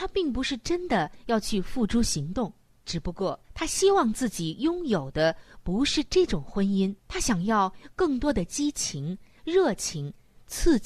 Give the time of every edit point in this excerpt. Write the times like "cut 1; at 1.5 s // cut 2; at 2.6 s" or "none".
cut 1; at 2.7 s // cut 2; at 3.4 s // cut 3; at 7.0 s